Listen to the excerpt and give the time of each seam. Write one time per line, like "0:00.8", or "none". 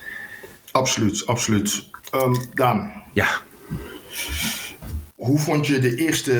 0:05.1